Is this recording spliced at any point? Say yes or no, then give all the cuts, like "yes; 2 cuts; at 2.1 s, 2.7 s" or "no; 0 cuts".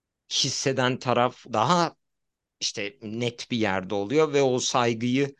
yes; 1 cut; at 1.5 s